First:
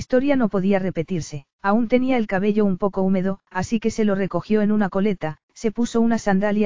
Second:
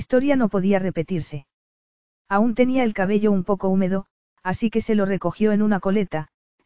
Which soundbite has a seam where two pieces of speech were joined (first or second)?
first